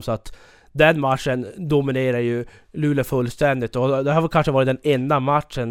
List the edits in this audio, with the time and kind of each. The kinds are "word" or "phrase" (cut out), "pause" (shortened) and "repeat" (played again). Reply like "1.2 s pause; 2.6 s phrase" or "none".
none

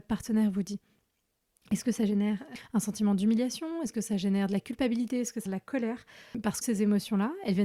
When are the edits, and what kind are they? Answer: 5.5 s word; 6.6 s phrase

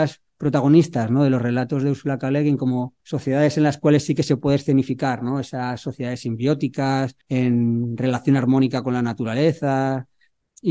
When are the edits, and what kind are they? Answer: 3.0 s pause; 7.2 s pause

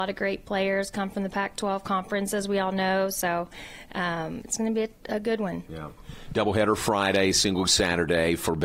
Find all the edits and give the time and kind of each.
7.7 s word

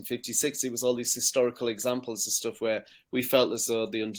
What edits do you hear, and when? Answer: none

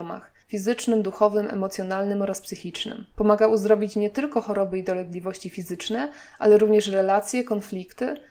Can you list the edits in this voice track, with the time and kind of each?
3.1 s pause

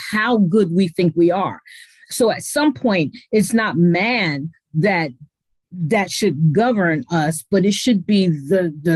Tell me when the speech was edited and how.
none

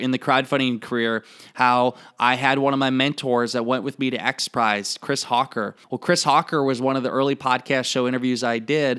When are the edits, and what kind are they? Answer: 5.8 s pause

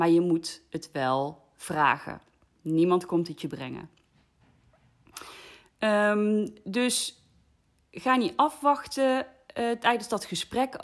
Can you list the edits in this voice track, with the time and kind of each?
none

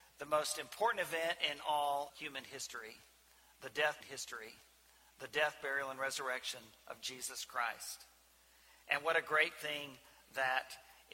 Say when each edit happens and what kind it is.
2.1 s word; 4.0 s repeat

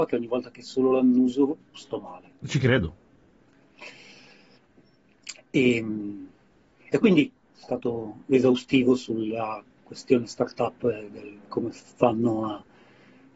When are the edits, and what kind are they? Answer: 1.7 s pause; 6.9 s word; 7.4 s phrase; 8.2 s pause; 11.4 s pause

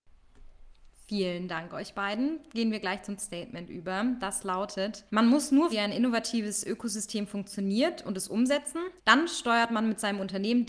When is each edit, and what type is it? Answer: 3.2 s word; 5.1 s pause; 5.7 s word; 9.0 s pause

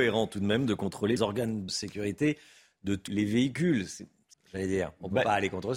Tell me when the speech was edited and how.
1.2 s word; 1.7 s word; 3.1 s word; 4.3 s word

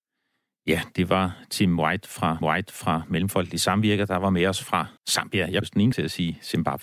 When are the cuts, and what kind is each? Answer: 2.4 s repeat; 5.0 s pause; 5.6 s word; 5.9 s word

